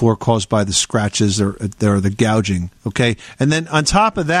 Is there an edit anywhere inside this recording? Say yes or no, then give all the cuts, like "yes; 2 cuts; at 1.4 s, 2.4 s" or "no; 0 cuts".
yes; 1 cut; at 2.8 s